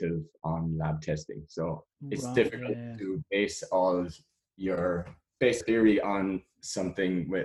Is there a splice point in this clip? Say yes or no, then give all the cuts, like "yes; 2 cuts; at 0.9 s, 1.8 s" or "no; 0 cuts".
yes; 2 cuts; at 1.9 s, 5.6 s